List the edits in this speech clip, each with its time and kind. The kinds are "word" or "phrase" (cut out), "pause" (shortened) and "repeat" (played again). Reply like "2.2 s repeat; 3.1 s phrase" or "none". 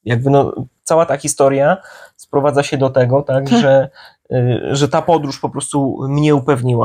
none